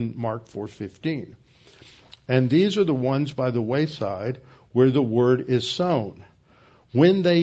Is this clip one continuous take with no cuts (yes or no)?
yes